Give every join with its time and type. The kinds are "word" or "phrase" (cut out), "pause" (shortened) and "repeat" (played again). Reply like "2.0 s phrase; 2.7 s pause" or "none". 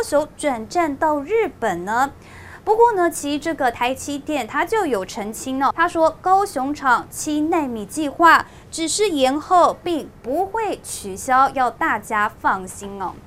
5.7 s word